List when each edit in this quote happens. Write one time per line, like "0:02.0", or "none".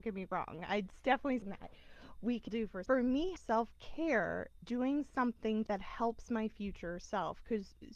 0:01.4
0:02.5
0:02.9
0:03.4
0:04.6
0:05.7